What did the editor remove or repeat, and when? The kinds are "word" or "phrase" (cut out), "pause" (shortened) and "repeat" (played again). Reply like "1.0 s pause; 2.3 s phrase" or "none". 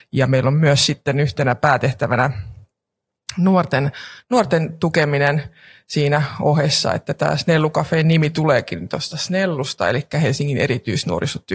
none